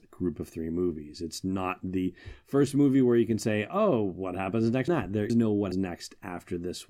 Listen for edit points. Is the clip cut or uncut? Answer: cut